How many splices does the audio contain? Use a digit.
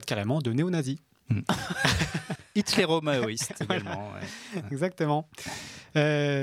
0